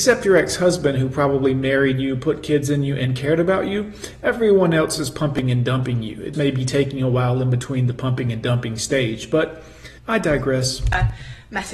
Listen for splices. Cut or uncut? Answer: cut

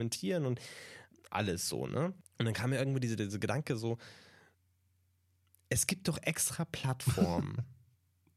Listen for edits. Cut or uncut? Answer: uncut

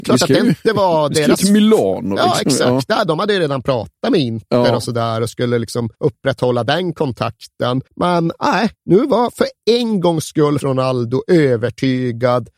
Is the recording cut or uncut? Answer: cut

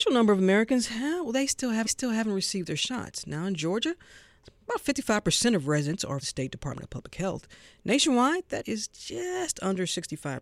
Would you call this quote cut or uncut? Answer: cut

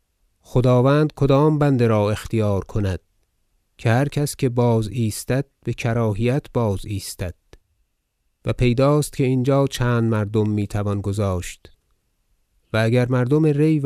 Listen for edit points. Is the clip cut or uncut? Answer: uncut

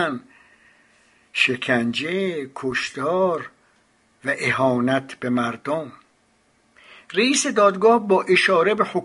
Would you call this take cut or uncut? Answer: uncut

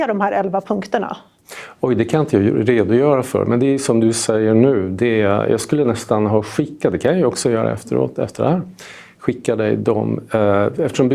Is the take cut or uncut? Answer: uncut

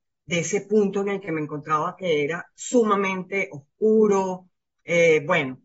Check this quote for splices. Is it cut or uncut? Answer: uncut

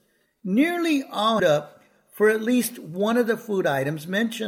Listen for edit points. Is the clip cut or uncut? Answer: cut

